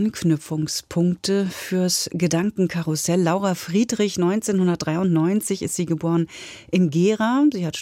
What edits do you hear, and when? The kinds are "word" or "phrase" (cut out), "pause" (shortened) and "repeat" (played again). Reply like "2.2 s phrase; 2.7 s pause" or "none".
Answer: none